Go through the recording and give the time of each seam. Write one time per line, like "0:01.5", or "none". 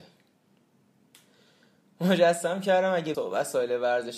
0:03.1